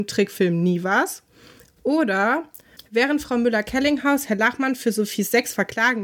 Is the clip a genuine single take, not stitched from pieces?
yes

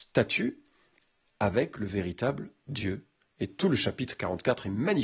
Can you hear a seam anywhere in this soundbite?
no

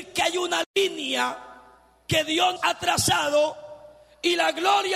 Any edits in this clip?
yes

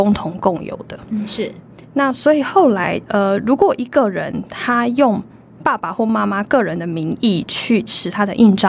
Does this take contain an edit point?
no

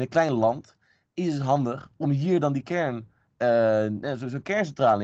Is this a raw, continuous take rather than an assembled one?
yes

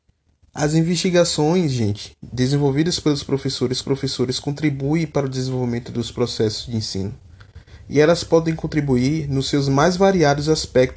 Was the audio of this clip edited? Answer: yes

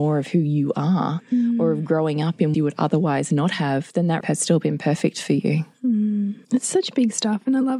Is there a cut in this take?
yes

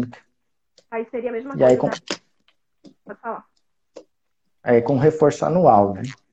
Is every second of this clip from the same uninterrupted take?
yes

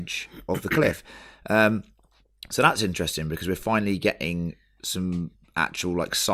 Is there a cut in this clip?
no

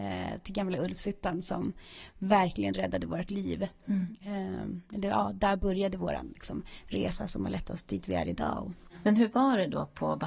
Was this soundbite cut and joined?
no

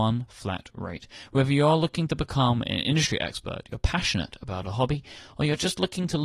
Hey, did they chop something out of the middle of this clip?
no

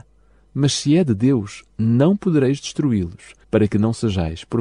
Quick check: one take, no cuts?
no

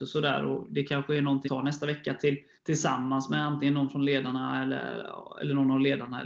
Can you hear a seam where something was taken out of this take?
yes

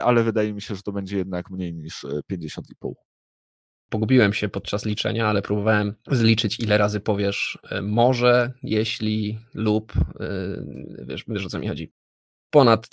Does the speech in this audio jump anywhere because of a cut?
no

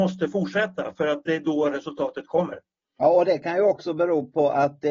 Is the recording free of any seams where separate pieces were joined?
yes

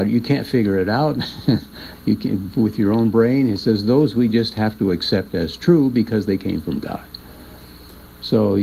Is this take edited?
no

